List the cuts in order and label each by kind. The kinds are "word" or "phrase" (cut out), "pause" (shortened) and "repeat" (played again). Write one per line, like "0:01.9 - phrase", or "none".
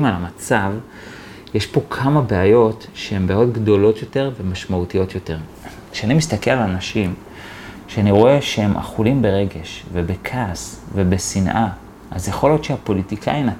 none